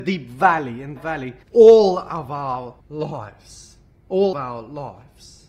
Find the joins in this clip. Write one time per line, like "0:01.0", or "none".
0:01.0
0:01.4
0:02.8
0:04.3